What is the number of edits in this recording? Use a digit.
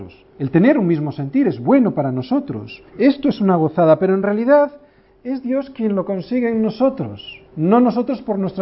2